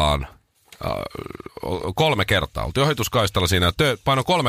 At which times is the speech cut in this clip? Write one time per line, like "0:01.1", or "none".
none